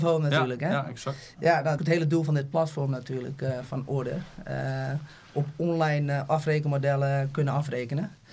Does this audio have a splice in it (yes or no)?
yes